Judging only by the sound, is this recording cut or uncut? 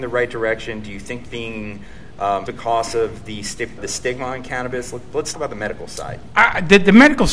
cut